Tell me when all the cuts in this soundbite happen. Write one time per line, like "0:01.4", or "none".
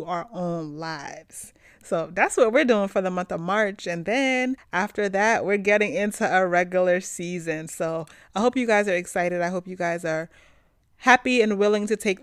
none

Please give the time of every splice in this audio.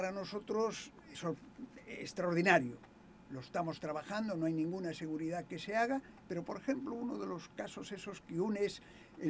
0:01.1

